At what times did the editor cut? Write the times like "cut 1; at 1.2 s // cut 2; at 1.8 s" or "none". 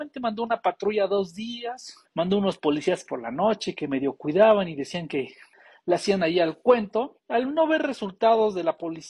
cut 1; at 2.1 s // cut 2; at 5.5 s // cut 3; at 7.2 s